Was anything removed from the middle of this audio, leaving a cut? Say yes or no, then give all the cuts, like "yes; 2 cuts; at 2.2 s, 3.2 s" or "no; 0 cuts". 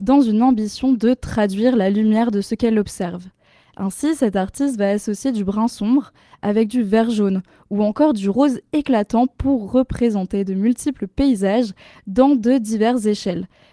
no; 0 cuts